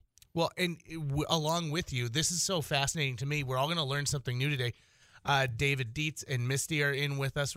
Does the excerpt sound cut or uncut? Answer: uncut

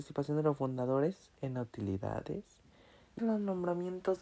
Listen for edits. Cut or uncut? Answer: cut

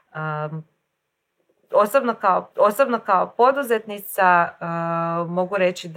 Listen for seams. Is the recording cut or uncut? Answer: cut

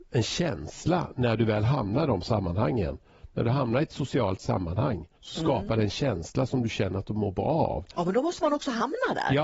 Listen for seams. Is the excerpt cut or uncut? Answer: cut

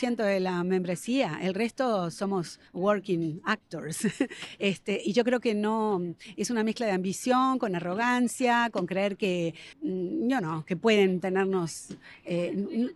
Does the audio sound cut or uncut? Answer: cut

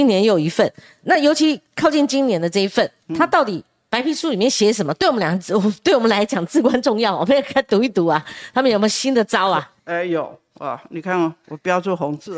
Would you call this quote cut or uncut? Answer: cut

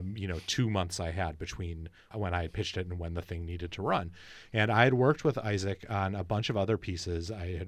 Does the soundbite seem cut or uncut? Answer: uncut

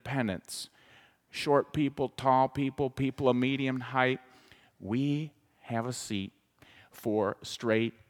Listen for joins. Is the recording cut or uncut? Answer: uncut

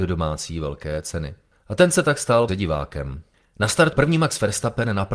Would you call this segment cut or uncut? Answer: cut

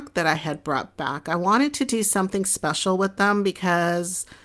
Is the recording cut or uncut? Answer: uncut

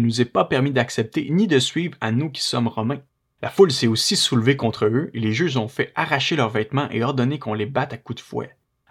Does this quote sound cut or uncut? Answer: cut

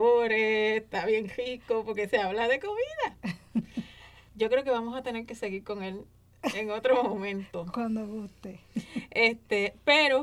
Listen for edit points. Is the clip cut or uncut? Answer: cut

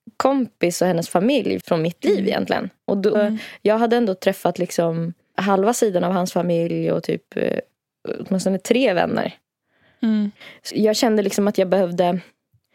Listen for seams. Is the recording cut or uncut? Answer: cut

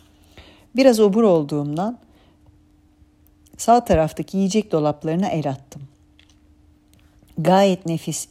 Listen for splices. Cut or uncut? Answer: uncut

